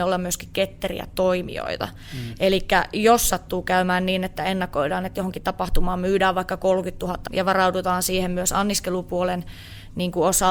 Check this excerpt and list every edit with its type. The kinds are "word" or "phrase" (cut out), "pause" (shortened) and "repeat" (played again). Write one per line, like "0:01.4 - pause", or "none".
0:07.3 - word

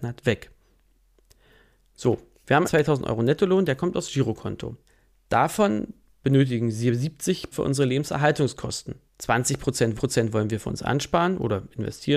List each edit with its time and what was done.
0:02.6 - word
0:04.9 - pause
0:07.5 - word
0:09.1 - pause
0:09.9 - repeat

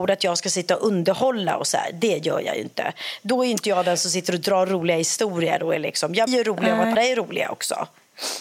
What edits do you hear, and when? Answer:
0:06.3 - word
0:06.9 - word

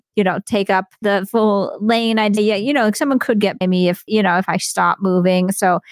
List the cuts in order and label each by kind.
0:01.0 - word
0:02.4 - word
0:03.6 - word
0:04.1 - word

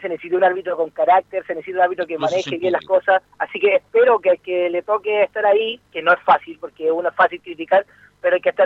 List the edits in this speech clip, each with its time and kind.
0:03.3 - pause

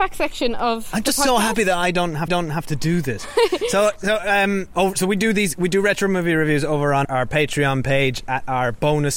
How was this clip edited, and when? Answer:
0:02.3 - repeat
0:07.0 - word

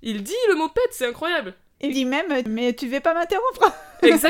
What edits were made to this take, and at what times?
0:01.9 - word

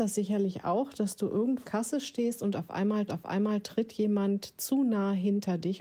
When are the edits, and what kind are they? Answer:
0:01.6 - phrase
0:03.1 - repeat

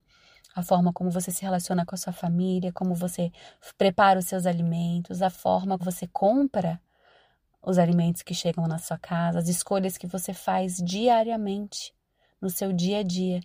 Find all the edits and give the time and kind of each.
0:05.8 - word

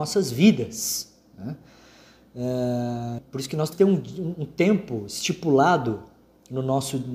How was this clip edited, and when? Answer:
0:03.2 - word
0:03.7 - word

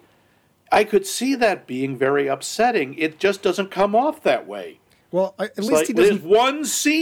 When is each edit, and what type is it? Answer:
none

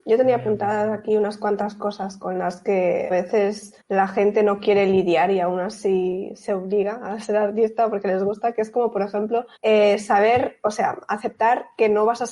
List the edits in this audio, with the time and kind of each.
0:03.1 - word
0:03.8 - pause
0:09.6 - pause

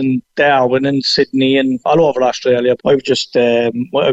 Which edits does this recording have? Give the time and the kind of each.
0:02.8 - word

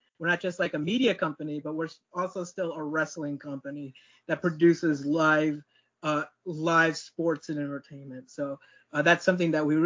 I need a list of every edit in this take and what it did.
none

